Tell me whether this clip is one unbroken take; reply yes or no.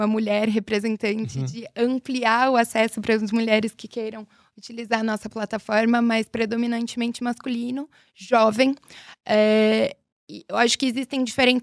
yes